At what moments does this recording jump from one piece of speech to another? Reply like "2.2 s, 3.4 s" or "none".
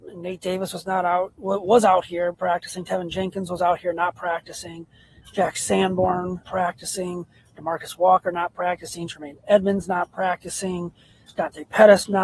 2.3 s, 6.4 s